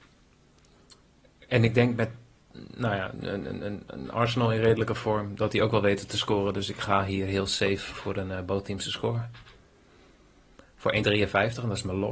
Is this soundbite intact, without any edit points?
yes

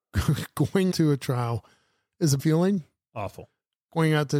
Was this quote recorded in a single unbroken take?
no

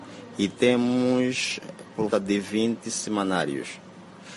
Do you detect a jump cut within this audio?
yes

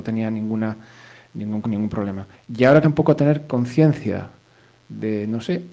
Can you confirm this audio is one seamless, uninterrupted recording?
no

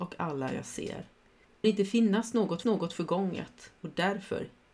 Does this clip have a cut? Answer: yes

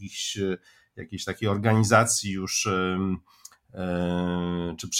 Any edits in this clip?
no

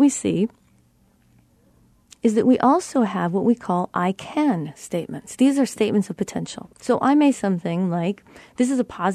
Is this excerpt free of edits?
no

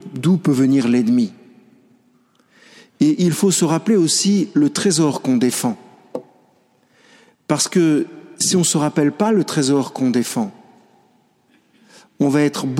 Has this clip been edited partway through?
no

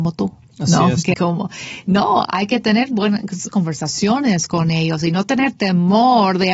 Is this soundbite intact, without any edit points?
no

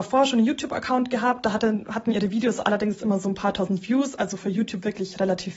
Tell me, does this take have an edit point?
no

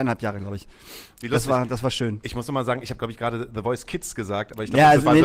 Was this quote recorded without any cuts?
yes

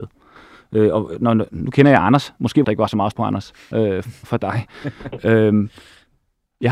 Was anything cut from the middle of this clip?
yes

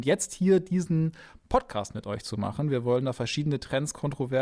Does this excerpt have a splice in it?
no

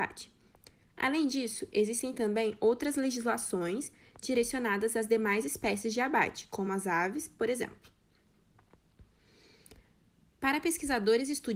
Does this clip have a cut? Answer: no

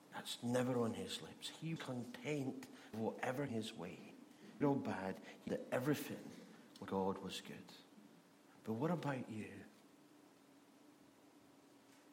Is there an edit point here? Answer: yes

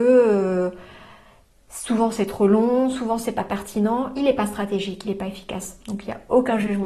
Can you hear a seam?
no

